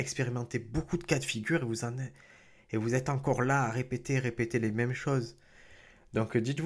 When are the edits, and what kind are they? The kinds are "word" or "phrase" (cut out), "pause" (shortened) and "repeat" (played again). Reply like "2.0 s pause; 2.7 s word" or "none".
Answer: none